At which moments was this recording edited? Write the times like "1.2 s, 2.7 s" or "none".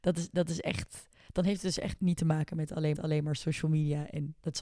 2.0 s, 2.9 s